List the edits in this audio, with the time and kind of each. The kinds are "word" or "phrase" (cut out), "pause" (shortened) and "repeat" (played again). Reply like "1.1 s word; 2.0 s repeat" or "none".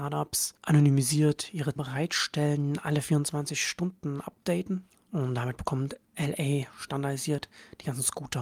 1.8 s word